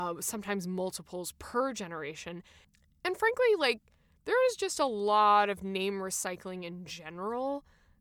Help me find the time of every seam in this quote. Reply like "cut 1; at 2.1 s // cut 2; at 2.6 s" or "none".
none